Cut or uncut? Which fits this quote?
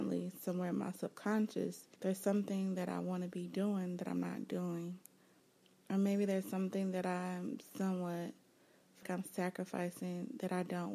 cut